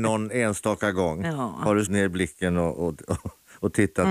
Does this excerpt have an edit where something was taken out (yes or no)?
yes